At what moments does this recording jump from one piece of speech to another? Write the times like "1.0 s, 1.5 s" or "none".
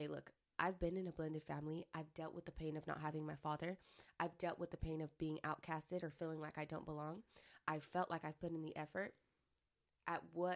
none